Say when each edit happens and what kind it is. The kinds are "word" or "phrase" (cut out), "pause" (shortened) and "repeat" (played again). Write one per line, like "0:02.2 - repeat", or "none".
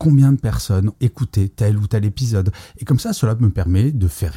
0:00.9 - word